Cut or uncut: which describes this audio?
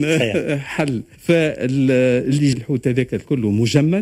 cut